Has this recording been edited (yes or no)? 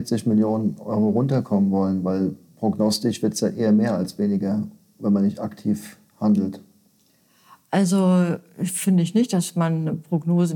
no